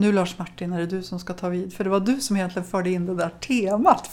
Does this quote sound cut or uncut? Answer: uncut